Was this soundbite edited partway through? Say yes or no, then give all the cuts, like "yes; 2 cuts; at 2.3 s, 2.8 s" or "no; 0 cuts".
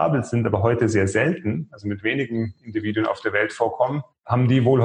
no; 0 cuts